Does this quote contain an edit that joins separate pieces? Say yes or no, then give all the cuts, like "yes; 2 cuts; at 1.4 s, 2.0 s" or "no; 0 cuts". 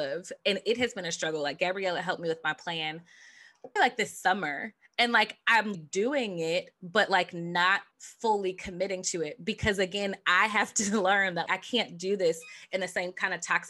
yes; 4 cuts; at 3.8 s, 5.7 s, 7.9 s, 11.5 s